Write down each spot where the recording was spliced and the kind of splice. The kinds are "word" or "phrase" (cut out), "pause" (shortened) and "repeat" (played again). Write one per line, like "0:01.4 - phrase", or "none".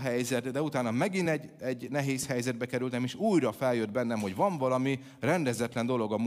none